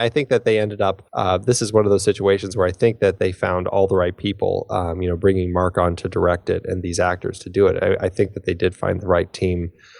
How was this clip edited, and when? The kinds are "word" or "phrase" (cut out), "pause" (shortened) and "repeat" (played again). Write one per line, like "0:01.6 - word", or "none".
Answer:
0:01.1 - pause